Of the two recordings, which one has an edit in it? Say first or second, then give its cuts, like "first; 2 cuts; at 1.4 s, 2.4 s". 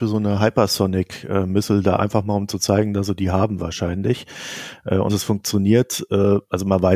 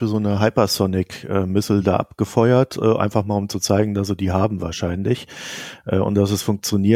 first; 2 cuts; at 2.0 s, 5.1 s